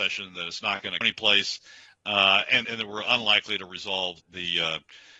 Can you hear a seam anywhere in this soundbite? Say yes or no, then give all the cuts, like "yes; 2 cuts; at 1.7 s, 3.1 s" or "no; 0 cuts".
yes; 3 cuts; at 1.0 s, 2.6 s, 4.2 s